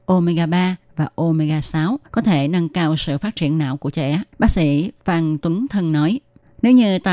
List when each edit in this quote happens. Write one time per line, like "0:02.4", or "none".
0:02.1
0:04.3